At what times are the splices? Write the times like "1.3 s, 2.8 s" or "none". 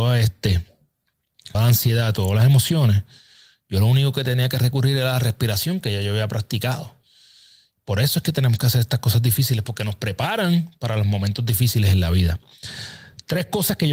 1.5 s